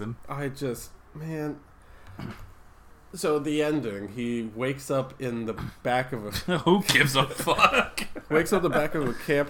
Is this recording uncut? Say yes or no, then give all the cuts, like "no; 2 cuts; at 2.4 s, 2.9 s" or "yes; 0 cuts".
yes; 0 cuts